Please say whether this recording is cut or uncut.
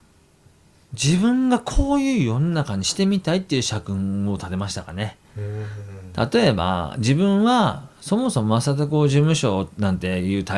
uncut